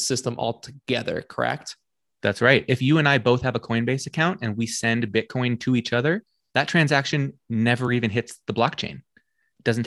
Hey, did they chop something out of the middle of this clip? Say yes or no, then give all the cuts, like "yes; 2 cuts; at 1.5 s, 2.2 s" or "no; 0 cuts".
no; 0 cuts